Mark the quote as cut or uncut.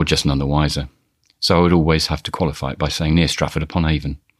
cut